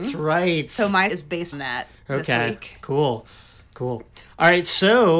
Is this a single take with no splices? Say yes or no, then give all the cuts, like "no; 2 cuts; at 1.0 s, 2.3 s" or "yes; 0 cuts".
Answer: no; 2 cuts; at 1.1 s, 1.5 s